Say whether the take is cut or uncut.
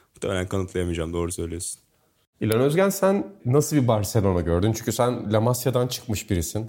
uncut